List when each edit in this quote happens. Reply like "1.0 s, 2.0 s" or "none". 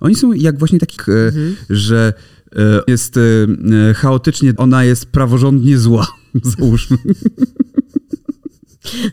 1.0 s, 2.9 s, 4.6 s